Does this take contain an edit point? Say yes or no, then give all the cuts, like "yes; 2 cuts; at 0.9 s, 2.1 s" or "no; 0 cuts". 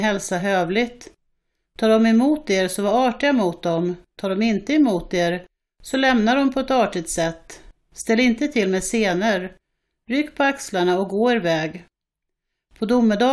no; 0 cuts